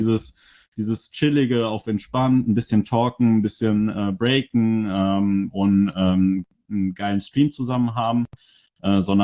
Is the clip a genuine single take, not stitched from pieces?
yes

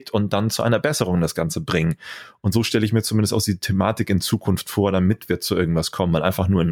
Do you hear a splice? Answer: no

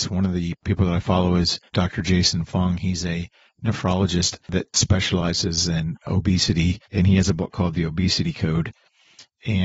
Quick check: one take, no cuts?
no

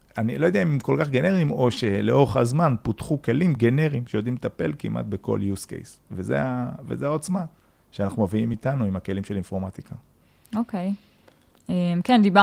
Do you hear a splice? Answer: no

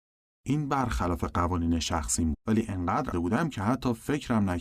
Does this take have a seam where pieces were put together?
yes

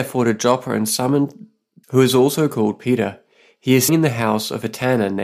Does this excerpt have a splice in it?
yes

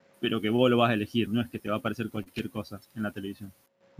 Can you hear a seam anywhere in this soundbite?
yes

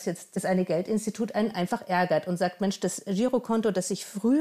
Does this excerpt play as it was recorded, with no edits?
yes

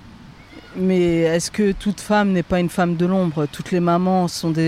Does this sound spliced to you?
no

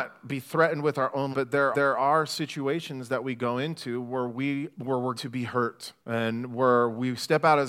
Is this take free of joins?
no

